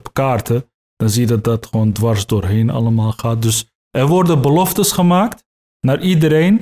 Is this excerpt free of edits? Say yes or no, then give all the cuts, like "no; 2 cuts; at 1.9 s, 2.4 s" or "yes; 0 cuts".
yes; 0 cuts